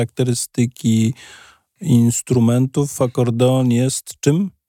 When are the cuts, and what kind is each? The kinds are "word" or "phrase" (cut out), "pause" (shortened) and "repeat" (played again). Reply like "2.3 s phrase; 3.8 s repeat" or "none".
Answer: none

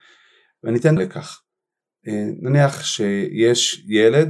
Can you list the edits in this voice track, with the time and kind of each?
1.0 s word

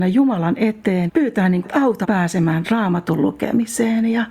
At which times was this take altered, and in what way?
1.1 s word; 1.6 s word; 2.0 s word; 2.6 s word

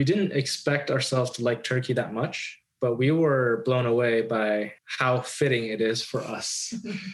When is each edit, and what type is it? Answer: 2.7 s pause; 4.8 s pause

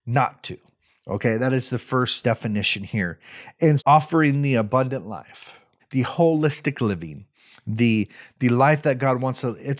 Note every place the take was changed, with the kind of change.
2.2 s word; 3.8 s word; 5.8 s word

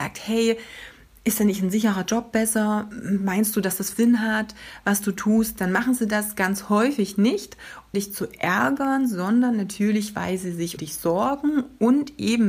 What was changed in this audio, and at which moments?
3.9 s word; 7.9 s word; 10.8 s word

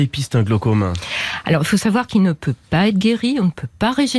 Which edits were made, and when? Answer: none

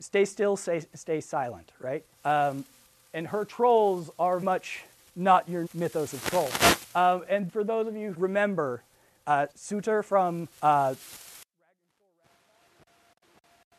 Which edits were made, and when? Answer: 2.1 s pause; 4.4 s word; 5.0 s pause; 5.7 s word; 7.5 s word; 8.1 s word; 9.5 s pause; 10.5 s pause

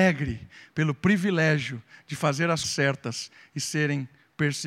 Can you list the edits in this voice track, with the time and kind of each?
2.6 s word

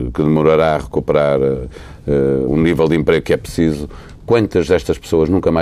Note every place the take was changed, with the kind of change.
2.5 s word

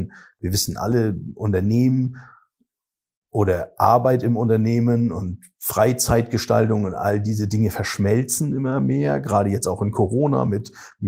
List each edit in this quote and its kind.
none

